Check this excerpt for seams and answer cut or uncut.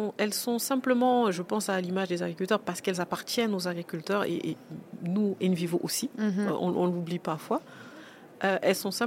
uncut